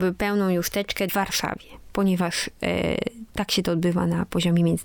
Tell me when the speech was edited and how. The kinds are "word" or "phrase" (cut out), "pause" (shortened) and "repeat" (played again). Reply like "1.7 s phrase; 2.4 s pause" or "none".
1.1 s phrase

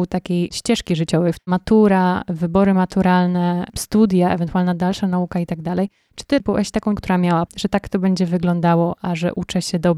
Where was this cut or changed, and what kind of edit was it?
1.4 s word; 6.4 s word; 7.0 s word; 7.5 s word

